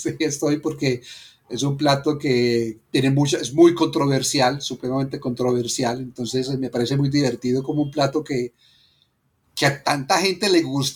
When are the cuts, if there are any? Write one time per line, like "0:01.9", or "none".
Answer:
none